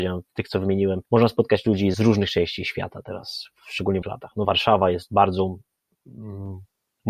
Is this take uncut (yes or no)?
no